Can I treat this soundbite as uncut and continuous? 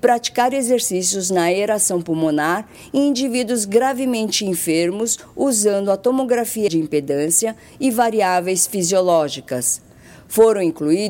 no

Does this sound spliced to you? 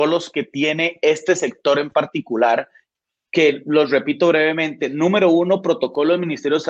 no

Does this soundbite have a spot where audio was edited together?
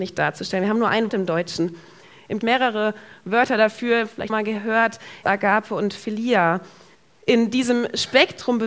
yes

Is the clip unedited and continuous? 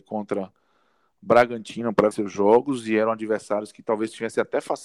no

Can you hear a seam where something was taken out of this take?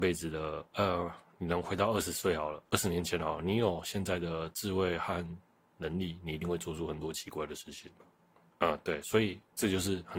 yes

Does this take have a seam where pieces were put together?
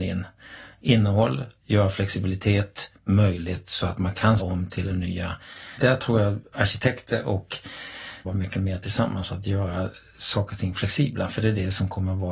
yes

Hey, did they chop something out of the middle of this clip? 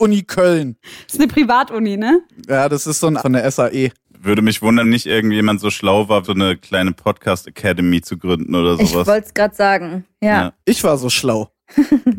yes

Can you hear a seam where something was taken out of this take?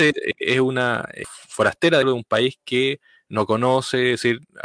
yes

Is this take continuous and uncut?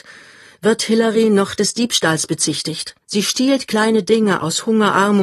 no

